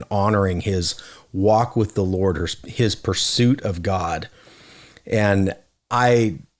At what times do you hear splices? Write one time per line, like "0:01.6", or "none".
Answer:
none